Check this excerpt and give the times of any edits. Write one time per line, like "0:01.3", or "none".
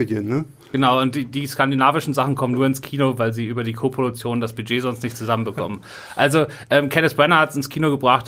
none